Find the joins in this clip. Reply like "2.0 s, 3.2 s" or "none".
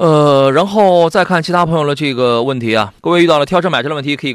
3.0 s